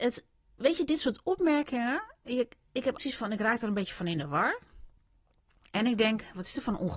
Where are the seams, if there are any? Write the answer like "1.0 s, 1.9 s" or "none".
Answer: 3.0 s